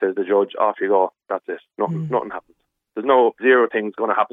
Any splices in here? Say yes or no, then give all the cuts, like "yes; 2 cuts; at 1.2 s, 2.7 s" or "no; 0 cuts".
yes; 1 cut; at 3.4 s